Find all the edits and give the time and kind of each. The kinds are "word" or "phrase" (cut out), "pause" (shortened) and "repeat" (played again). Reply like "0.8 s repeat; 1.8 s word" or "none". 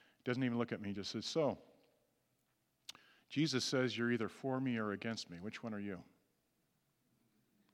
none